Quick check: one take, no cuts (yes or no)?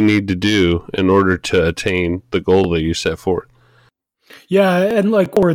yes